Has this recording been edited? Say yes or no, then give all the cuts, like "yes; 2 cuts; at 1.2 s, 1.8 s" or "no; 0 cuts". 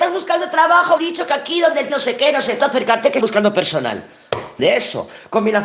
yes; 5 cuts; at 1.0 s, 1.9 s, 2.6 s, 3.2 s, 4.6 s